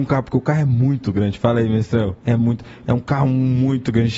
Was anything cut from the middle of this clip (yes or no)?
yes